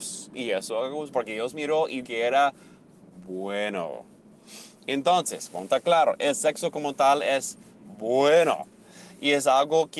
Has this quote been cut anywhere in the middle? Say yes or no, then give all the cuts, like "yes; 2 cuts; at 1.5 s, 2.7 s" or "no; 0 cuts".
yes; 2 cuts; at 1.1 s, 2.0 s